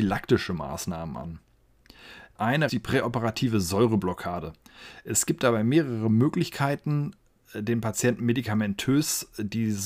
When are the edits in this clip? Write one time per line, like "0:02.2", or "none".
0:02.7